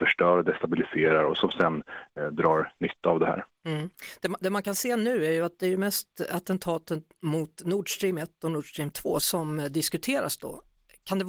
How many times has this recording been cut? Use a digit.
1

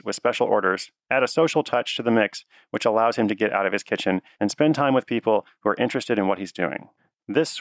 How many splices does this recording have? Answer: 0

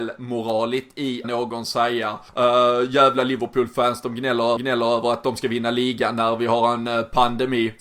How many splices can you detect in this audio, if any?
3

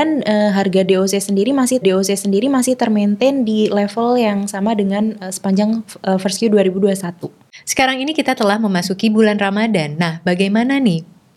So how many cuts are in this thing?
1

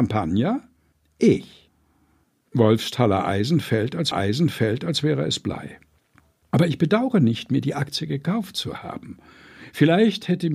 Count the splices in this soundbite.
1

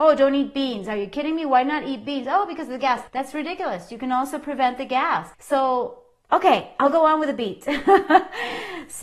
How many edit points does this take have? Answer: 2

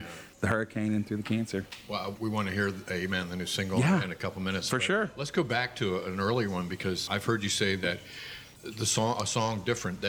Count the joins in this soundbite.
3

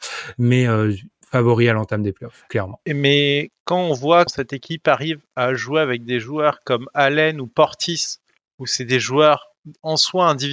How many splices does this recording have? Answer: 1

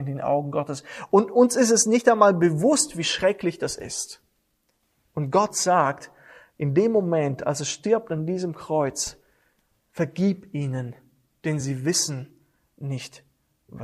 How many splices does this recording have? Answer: 0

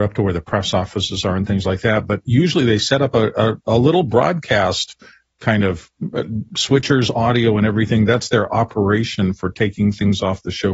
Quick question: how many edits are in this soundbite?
0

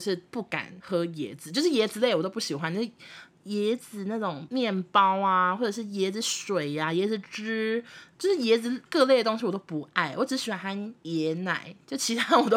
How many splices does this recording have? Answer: 1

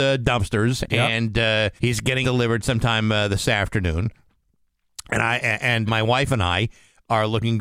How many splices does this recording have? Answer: 3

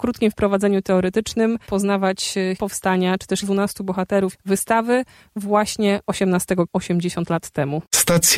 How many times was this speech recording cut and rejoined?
5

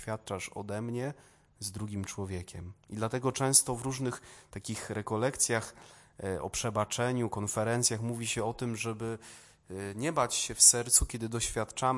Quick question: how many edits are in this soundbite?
1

